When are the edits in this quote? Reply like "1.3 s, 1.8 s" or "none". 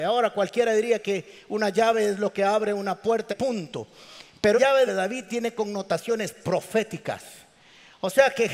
3.3 s, 4.5 s, 4.9 s

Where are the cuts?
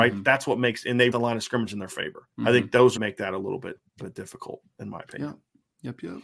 1.1 s, 2.3 s, 3.0 s, 4.0 s

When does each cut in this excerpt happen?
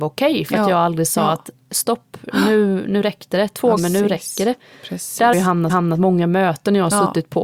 3.8 s, 5.3 s, 5.7 s

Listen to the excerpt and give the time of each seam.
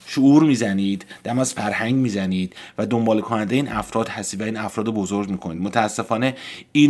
none

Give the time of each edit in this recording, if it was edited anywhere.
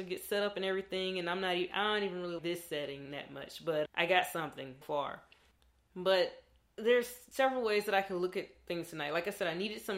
2.4 s, 3.9 s, 4.8 s

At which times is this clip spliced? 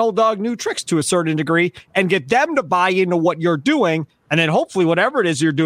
none

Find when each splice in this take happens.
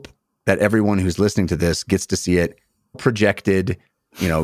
2.9 s

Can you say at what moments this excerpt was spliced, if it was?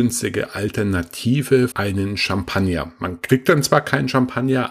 1.7 s

